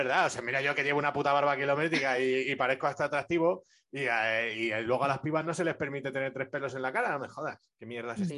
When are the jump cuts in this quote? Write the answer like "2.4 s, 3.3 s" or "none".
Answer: none